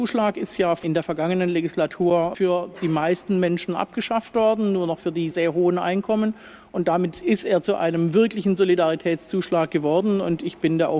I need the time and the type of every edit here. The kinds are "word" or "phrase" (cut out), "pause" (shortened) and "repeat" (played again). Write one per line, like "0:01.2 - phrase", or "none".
0:05.3 - word